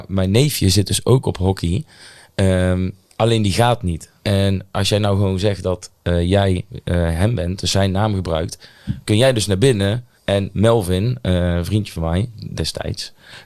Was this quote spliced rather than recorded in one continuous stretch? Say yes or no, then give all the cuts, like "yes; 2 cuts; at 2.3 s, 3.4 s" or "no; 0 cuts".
yes; 2 cuts; at 4.2 s, 10.1 s